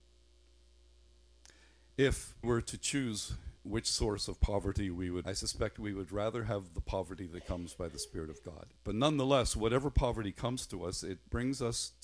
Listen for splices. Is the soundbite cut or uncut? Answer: cut